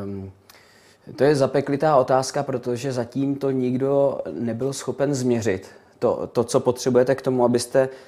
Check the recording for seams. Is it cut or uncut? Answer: uncut